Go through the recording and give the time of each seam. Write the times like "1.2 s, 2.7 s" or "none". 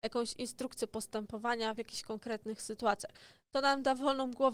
none